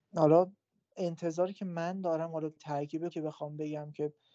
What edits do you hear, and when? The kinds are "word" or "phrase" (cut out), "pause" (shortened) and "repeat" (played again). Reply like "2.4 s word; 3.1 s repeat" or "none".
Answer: 2.6 s word; 3.1 s word